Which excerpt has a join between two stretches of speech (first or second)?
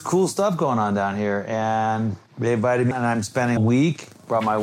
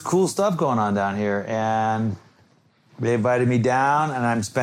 first